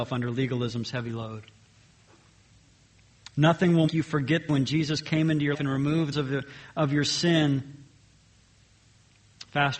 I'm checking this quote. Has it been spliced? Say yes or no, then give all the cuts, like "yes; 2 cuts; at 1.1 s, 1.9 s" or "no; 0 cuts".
yes; 4 cuts; at 3.9 s, 4.5 s, 5.5 s, 6.1 s